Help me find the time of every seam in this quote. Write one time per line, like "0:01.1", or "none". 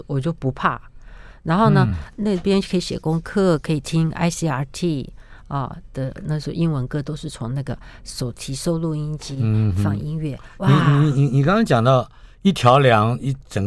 none